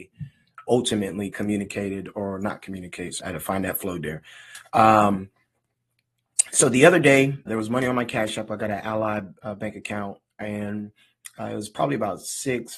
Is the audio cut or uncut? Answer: cut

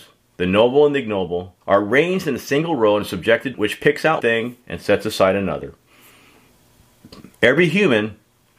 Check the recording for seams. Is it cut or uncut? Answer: cut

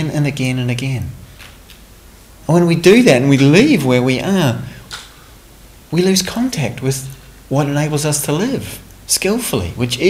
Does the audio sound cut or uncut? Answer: uncut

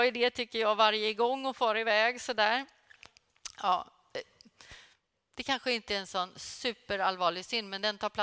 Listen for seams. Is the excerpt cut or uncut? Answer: uncut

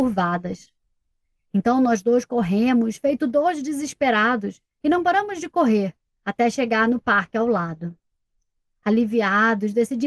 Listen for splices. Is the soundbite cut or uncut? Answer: uncut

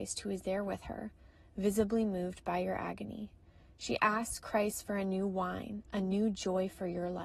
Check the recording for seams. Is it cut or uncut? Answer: uncut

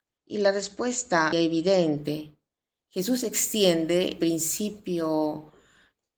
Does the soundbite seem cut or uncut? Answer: cut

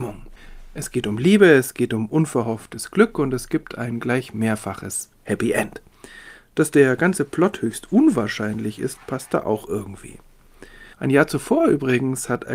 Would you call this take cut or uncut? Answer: cut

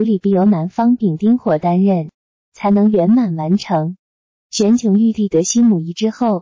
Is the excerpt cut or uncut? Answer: uncut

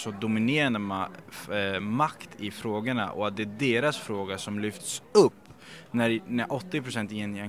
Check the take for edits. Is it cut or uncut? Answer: uncut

